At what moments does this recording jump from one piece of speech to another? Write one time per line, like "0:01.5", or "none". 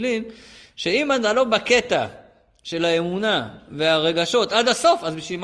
none